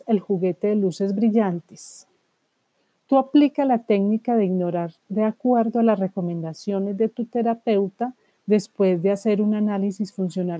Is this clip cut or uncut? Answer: uncut